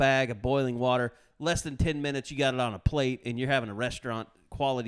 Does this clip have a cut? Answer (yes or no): no